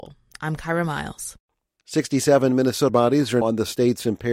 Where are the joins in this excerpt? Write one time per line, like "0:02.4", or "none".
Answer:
0:02.9
0:03.4